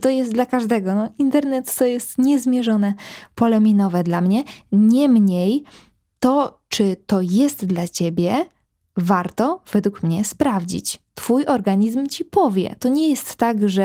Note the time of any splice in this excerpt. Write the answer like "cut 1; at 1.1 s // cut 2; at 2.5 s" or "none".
none